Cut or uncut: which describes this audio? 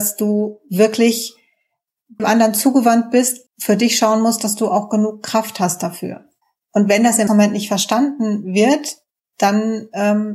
cut